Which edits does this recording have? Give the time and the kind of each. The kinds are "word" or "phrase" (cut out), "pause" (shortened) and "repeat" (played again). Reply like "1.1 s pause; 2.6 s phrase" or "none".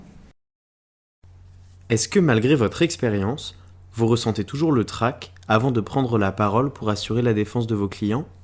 none